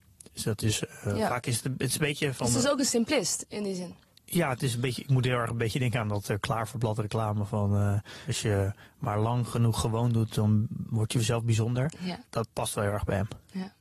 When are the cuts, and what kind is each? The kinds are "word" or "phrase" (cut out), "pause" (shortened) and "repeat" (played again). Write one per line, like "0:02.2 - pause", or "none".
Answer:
0:04.1 - pause